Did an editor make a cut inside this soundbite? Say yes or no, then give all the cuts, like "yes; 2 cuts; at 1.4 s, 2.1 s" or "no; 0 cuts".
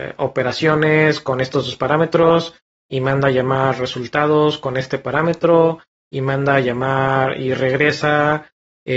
no; 0 cuts